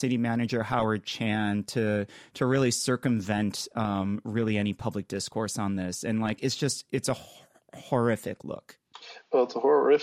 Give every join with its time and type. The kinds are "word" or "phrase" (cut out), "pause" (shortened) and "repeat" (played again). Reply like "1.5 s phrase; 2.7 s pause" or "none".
none